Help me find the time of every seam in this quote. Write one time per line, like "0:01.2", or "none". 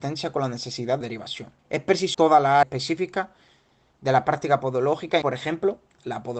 0:01.0
0:01.6
0:02.1
0:02.6
0:05.2